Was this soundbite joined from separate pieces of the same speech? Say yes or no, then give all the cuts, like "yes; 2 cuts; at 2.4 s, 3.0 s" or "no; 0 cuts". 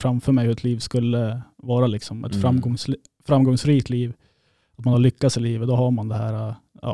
no; 0 cuts